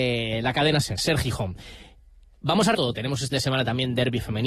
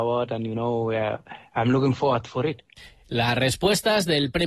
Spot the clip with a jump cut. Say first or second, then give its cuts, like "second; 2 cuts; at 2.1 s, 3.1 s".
first; 3 cuts; at 1.0 s, 2.7 s, 3.3 s